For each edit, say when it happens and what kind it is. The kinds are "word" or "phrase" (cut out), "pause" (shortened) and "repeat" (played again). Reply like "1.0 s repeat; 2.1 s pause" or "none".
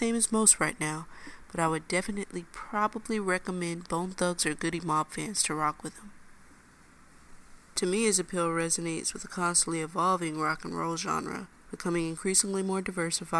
11.5 s pause